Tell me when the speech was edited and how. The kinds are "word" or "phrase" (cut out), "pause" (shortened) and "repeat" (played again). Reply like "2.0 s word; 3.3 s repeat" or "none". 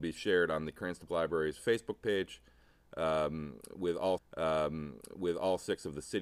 1.1 s word; 4.2 s repeat